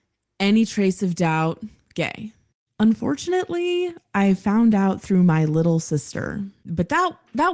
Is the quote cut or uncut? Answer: uncut